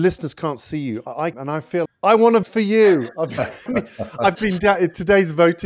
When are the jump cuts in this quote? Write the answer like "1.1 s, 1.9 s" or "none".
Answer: 1.3 s, 1.9 s, 2.4 s, 3.7 s, 4.3 s

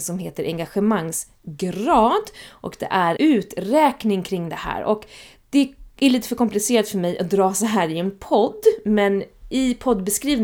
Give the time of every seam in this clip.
3.2 s

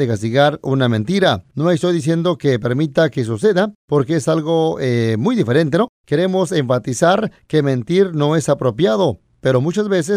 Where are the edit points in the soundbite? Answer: none

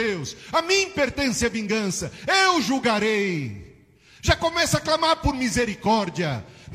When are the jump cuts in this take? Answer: none

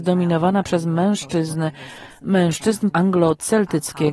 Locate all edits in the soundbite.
2.9 s

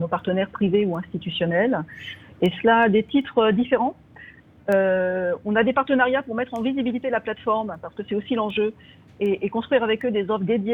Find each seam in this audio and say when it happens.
none

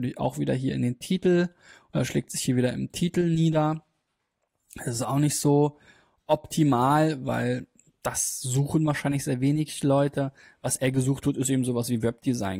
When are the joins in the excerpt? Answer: none

